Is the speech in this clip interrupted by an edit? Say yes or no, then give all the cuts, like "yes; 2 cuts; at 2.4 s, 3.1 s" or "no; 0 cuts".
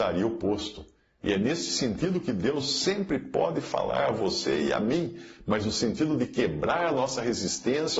no; 0 cuts